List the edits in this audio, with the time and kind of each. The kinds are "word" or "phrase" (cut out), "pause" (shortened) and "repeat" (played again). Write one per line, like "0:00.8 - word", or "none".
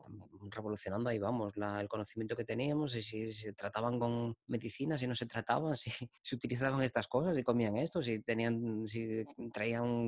0:04.4 - pause
0:06.2 - pause